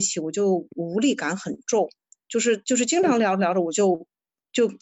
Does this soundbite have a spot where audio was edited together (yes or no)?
no